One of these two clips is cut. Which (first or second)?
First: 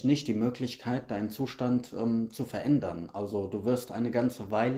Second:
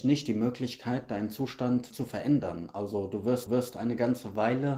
second